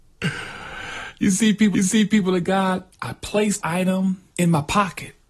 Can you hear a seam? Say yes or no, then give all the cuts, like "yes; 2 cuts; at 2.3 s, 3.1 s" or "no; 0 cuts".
yes; 4 cuts; at 1.7 s, 2.9 s, 3.6 s, 4.3 s